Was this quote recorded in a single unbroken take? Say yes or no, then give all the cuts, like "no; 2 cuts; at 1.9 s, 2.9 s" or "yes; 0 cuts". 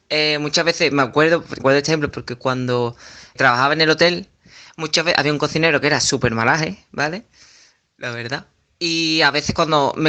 no; 3 cuts; at 1.6 s, 2.1 s, 3.4 s